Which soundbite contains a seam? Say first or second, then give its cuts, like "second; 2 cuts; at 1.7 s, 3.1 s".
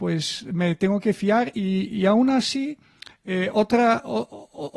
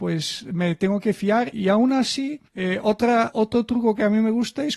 second; 3 cuts; at 1.5 s, 2.5 s, 3.3 s